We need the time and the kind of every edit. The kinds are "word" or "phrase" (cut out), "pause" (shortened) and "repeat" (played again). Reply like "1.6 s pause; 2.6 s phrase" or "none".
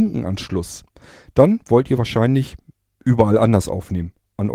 none